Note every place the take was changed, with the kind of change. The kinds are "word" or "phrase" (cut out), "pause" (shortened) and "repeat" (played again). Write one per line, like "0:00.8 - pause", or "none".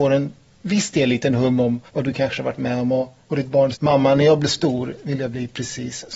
0:01.9 - pause
0:03.2 - pause
0:03.7 - phrase

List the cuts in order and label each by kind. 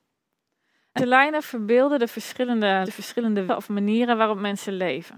0:01.0 - word
0:02.9 - word
0:03.5 - word

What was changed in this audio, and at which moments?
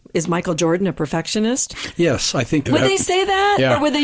0:02.7 - phrase

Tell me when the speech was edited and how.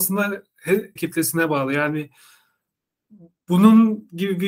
0:01.0 - phrase

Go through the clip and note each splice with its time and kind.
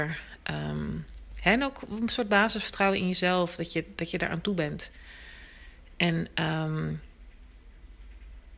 none

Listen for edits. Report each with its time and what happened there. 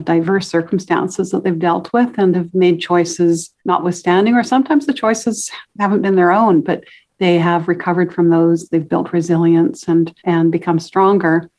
0:03.6 - pause
0:10.2 - pause

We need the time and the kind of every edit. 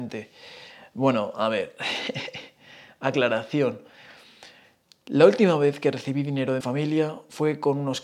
0:06.6 - word

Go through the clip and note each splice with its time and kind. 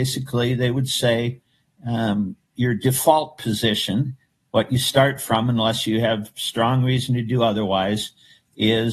none

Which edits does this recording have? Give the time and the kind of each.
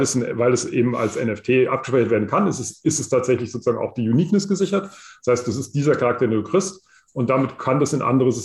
none

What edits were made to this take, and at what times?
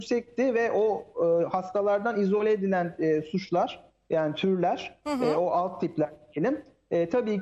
none

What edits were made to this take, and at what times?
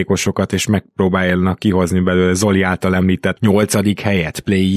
none

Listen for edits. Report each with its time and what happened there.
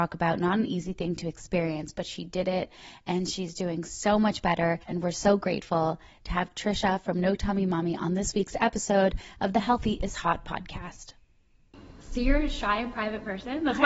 0:04.8 - pause

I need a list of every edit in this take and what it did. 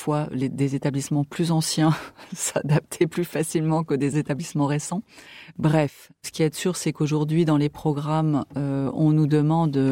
none

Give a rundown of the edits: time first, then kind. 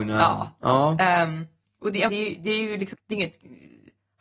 0:02.1 - word
0:02.9 - word

